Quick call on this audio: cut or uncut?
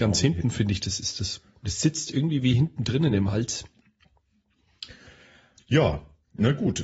uncut